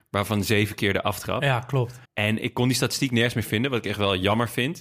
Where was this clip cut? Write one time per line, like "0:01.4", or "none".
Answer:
0:02.0